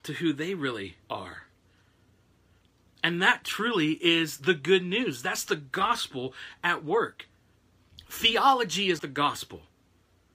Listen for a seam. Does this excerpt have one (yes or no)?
yes